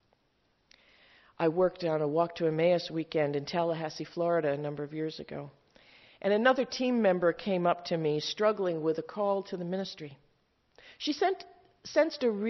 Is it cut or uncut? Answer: uncut